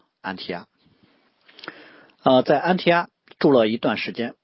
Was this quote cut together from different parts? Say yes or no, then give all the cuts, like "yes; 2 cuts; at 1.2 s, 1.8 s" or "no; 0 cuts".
no; 0 cuts